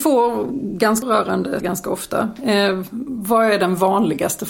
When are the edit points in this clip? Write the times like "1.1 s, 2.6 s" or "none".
1.0 s, 1.6 s